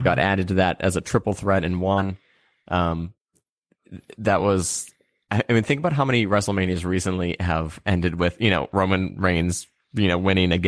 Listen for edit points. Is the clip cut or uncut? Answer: uncut